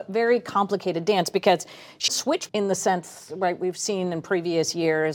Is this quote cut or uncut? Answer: cut